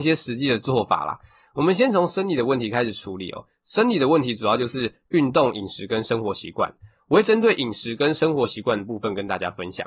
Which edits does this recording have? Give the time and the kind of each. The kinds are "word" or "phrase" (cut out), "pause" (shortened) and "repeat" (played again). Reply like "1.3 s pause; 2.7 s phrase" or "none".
none